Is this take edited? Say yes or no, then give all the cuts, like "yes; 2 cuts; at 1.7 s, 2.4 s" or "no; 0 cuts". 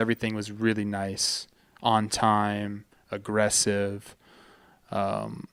no; 0 cuts